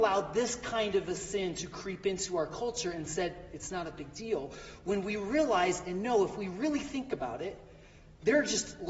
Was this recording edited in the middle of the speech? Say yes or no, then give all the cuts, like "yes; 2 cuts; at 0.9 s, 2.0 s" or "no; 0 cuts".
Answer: no; 0 cuts